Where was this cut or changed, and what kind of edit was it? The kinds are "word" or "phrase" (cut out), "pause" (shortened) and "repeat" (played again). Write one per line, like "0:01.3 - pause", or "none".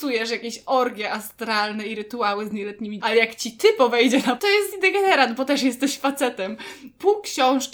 0:03.0 - word
0:04.4 - word
0:04.7 - word